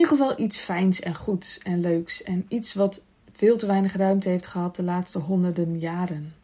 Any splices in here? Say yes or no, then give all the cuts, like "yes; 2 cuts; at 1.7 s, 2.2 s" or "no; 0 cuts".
no; 0 cuts